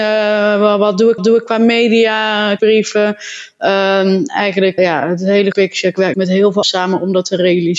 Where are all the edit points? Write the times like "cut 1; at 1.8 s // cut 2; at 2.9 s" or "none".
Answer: cut 1; at 1.2 s // cut 2; at 2.6 s // cut 3; at 4.8 s // cut 4; at 5.5 s // cut 5; at 6.1 s // cut 6; at 6.6 s